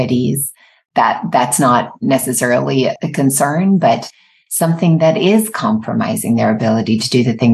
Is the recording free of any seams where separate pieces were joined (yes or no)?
yes